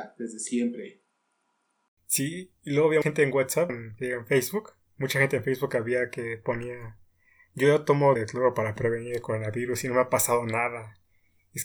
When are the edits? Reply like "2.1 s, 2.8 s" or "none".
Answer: 2.6 s, 3.0 s, 3.7 s, 8.2 s

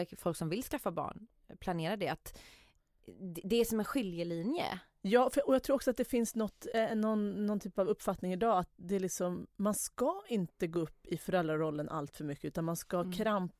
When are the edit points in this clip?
none

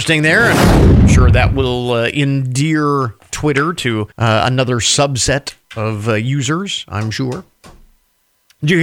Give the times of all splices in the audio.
4.1 s, 5.6 s

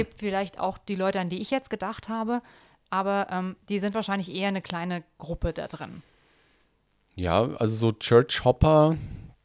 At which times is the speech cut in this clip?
none

